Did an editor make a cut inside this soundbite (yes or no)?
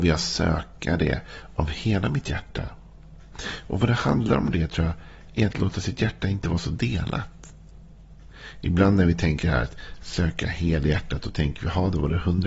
no